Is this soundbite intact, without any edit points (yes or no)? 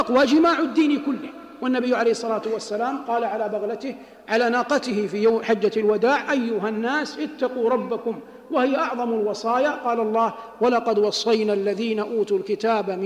yes